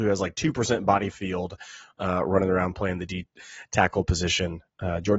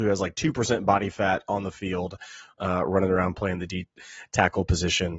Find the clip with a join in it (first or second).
first